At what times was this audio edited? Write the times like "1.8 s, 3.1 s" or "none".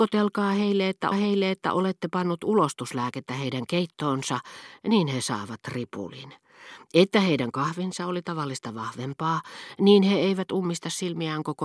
1.1 s

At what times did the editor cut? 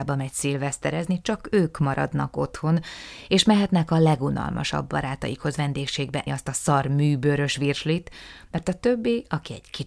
6.3 s

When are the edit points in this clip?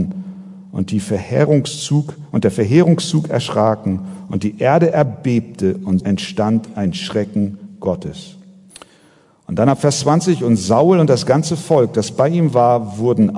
6.0 s, 8.7 s

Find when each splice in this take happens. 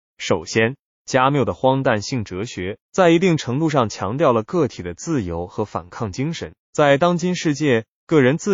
2.8 s, 6.6 s

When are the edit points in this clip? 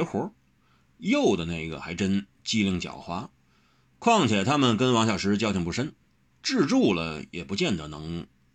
none

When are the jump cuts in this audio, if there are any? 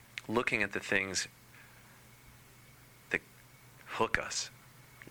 none

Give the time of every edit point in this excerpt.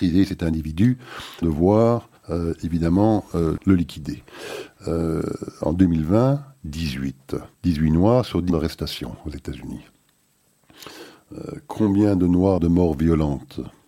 1.4 s, 2.2 s, 3.6 s, 7.5 s, 8.5 s, 12.6 s

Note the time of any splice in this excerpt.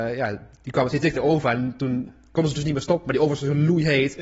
1.1 s

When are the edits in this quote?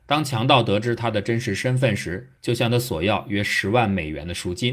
2.4 s

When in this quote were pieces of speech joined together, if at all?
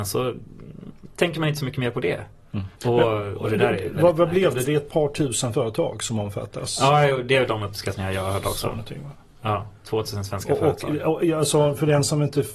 2.8 s

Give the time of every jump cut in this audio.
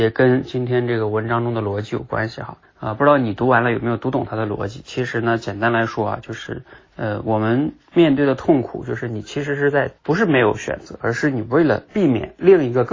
2.6 s, 6.8 s, 10.0 s, 11.9 s

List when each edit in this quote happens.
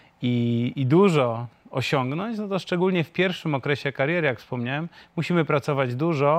none

